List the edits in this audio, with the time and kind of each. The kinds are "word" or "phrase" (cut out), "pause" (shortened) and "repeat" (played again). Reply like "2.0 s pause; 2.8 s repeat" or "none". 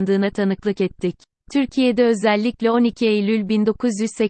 1.4 s pause